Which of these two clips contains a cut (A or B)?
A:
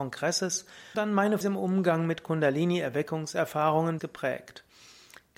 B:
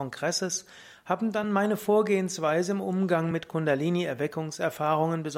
A